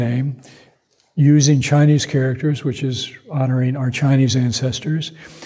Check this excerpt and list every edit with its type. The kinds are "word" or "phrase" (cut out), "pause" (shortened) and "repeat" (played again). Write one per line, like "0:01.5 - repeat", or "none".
none